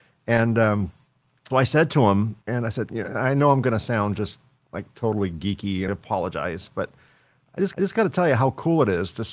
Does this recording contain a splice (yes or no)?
yes